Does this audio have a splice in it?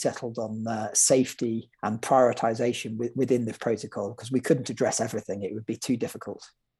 yes; 1 cut; at 1.7 s

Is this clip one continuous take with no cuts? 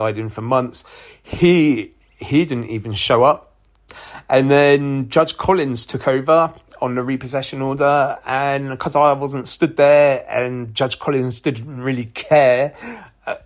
yes; 0 cuts

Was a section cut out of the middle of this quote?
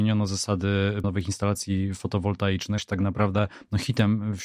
yes; 2 cuts; at 1.0 s, 2.8 s

